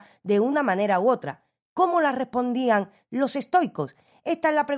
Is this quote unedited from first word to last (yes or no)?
yes